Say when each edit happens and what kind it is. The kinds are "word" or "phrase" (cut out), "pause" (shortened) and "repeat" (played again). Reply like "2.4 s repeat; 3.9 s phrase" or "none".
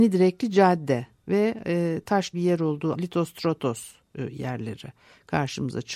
2.3 s word; 2.9 s word